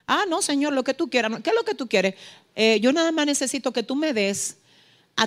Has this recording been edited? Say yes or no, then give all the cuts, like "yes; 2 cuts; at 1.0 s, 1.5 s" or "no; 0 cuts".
no; 0 cuts